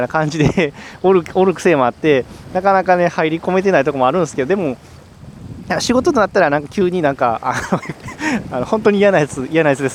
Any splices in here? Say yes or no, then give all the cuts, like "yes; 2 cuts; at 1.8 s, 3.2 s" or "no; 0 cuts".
no; 0 cuts